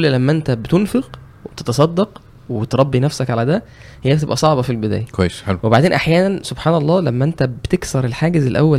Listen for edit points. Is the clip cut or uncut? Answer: uncut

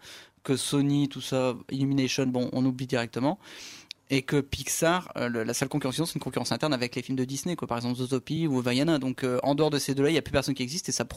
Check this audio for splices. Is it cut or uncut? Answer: uncut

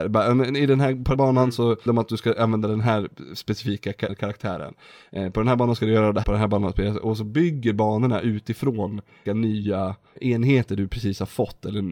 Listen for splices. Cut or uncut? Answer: cut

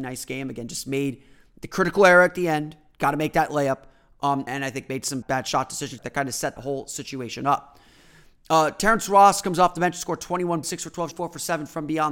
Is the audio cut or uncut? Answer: cut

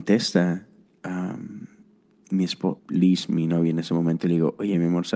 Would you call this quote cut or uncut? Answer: cut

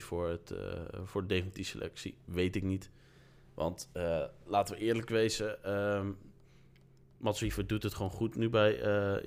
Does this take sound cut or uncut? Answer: uncut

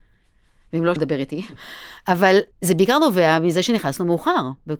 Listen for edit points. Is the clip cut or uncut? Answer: cut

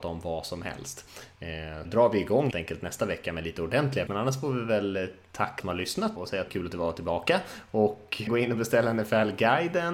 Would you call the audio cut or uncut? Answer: cut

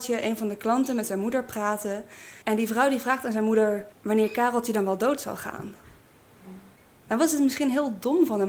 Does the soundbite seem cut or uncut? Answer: cut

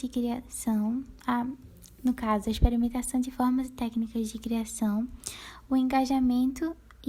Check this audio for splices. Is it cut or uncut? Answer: uncut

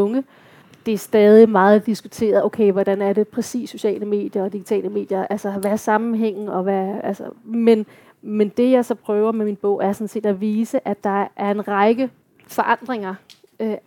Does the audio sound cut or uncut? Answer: uncut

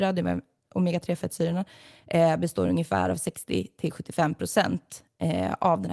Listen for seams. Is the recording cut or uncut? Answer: uncut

